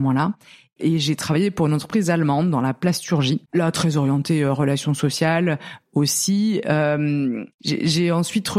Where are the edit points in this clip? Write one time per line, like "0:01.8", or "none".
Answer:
0:03.5
0:07.5

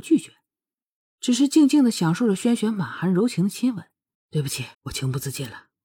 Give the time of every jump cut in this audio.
0:04.1
0:04.7

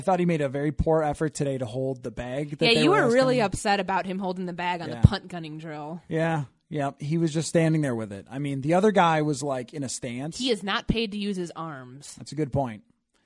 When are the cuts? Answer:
none

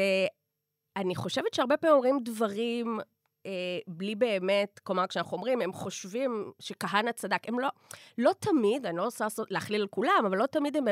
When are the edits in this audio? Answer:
none

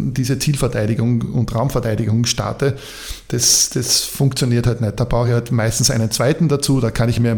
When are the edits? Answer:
none

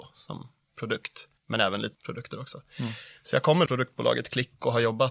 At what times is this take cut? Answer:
0:01.4
0:01.9
0:03.7

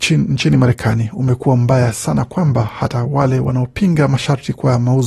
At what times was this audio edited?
none

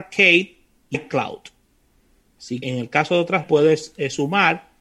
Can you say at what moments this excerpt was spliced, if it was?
0:00.9
0:02.6
0:03.4

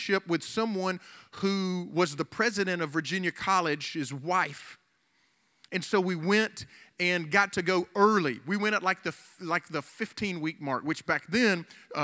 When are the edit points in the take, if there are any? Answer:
none

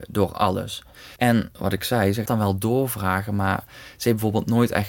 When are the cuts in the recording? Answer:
0:01.2
0:02.3

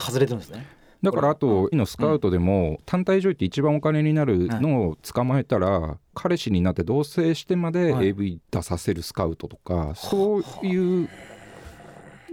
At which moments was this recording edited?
0:01.7

